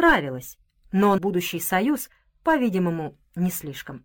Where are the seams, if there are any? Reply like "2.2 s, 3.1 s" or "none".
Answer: 1.2 s